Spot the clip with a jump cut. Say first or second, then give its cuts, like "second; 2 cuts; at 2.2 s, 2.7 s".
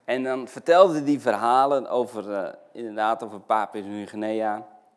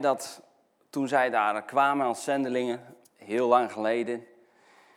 second; 1 cut; at 3.0 s